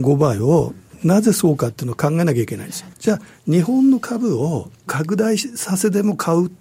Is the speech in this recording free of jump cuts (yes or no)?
no